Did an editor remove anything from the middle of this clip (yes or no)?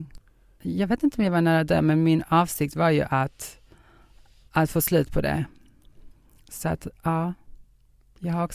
no